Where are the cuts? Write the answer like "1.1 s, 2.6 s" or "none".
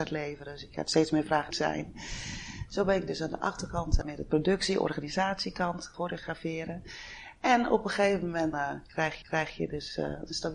1.5 s, 4.0 s, 5.9 s, 8.5 s, 9.2 s